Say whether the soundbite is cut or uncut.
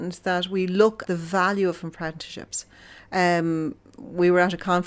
cut